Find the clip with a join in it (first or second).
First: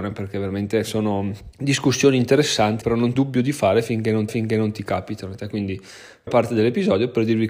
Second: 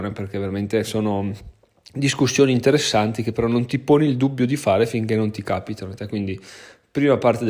first